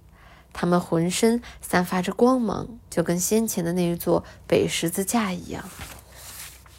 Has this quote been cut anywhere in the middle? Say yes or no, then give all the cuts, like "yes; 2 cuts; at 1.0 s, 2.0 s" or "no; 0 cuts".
yes; 1 cut; at 2.9 s